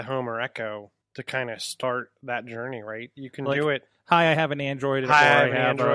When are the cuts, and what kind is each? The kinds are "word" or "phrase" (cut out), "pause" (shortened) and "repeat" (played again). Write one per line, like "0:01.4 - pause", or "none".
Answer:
0:01.0 - pause
0:02.2 - pause